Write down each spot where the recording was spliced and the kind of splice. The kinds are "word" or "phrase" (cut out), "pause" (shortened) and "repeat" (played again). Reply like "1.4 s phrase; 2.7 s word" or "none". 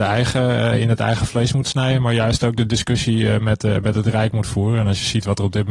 none